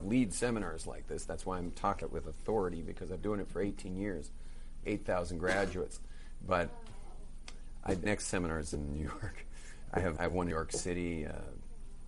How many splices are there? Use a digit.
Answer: 6